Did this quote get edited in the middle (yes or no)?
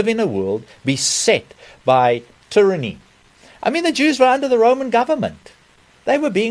no